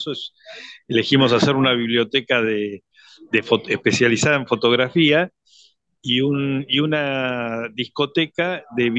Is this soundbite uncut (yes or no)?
yes